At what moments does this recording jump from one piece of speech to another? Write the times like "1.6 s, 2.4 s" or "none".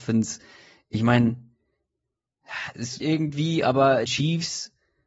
3.0 s, 4.1 s